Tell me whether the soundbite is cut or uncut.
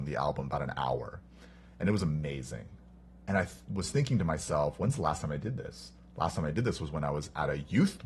uncut